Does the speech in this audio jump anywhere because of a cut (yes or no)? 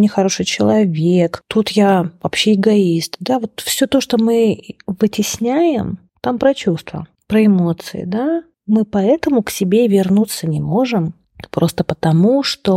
no